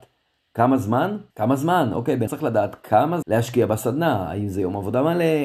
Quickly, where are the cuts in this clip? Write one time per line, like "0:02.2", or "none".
0:01.3
0:02.3
0:03.2